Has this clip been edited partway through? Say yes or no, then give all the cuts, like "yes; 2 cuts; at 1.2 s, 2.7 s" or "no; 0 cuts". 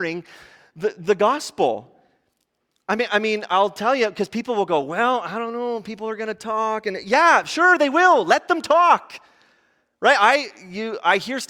no; 0 cuts